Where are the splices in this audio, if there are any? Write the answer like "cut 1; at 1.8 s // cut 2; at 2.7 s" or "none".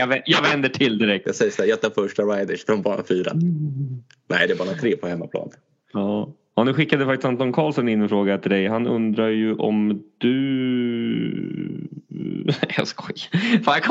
none